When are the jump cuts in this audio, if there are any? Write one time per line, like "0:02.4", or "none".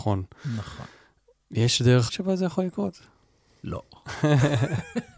0:02.1